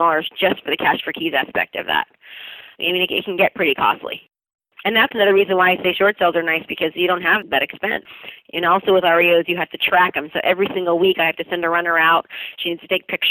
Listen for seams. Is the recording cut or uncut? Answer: uncut